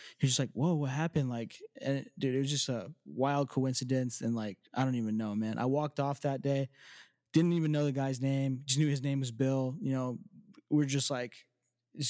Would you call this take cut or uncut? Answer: cut